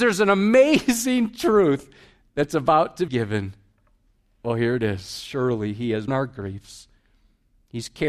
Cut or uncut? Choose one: cut